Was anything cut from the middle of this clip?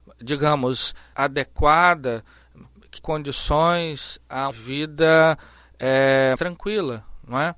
yes; 4 cuts; at 1.1 s, 3.0 s, 4.5 s, 6.4 s

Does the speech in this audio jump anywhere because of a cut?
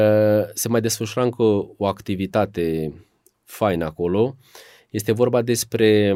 no; 0 cuts

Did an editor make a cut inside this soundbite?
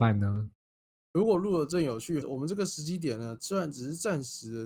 yes; 1 cut; at 2.2 s

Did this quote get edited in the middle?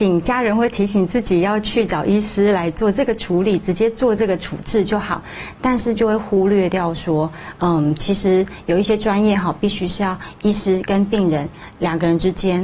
no; 0 cuts

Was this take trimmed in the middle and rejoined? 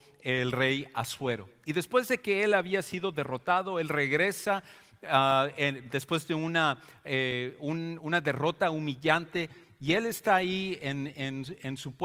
no; 0 cuts

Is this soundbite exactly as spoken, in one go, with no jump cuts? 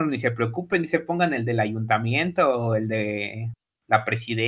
yes; 0 cuts

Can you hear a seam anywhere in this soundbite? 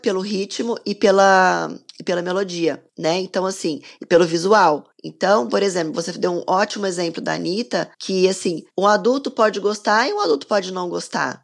yes; 4 cuts; at 2.9 s, 4.9 s, 7.9 s, 8.7 s

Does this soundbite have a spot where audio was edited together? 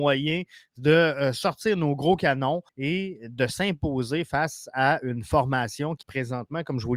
yes; 2 cuts; at 2.7 s, 6.0 s

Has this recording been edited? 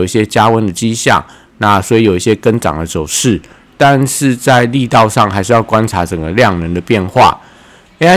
no; 0 cuts

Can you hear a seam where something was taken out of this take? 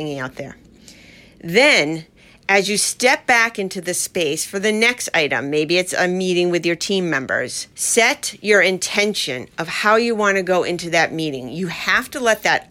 no; 0 cuts

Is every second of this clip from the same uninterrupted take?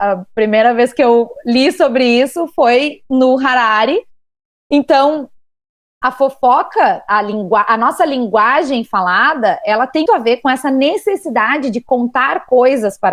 no; 1 cut; at 10.1 s

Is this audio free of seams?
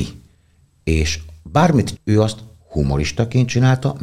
no; 1 cut; at 2.0 s

